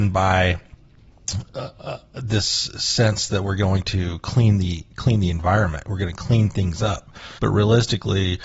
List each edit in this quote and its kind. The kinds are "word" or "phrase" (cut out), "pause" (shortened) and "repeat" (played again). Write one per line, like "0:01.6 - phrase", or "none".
0:07.4 - pause